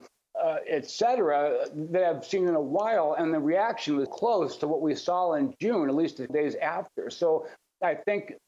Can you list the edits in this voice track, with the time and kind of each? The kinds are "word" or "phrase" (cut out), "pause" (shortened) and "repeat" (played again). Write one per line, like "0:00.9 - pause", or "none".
0:04.1 - word
0:06.3 - word